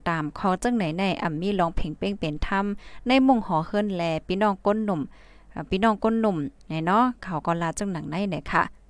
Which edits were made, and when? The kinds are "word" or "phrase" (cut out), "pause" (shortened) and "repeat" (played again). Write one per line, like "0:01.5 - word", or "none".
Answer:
0:06.6 - pause